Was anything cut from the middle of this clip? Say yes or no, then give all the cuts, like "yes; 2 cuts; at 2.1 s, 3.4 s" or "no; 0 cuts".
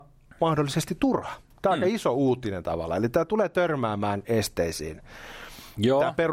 yes; 2 cuts; at 1.5 s, 4.2 s